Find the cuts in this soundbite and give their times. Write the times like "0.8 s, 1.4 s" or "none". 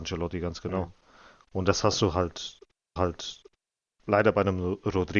3.0 s